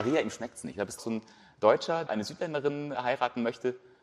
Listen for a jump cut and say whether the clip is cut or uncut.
cut